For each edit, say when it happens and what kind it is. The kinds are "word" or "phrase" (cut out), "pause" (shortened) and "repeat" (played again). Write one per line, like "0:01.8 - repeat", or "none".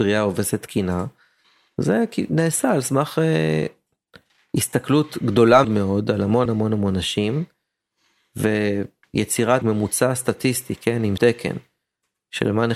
0:05.6 - word
0:06.5 - word
0:09.6 - word
0:11.2 - word

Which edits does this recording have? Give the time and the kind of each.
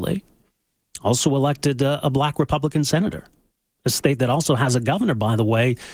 none

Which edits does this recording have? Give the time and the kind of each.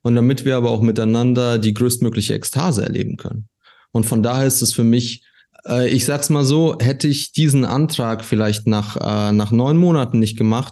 none

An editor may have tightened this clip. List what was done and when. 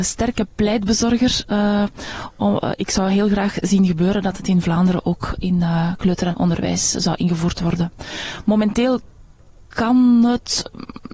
0:06.3 - word

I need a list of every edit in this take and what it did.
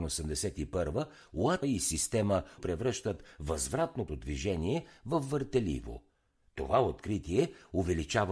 0:01.6 - word
0:02.6 - phrase
0:04.1 - word

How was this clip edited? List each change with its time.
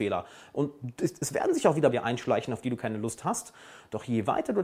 0:01.9 - phrase

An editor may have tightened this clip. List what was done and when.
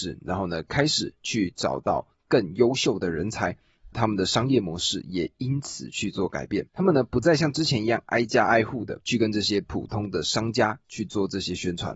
0:03.9 - phrase
0:06.7 - pause
0:09.0 - pause

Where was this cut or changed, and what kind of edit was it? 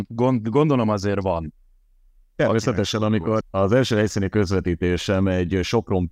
0:03.4 - word

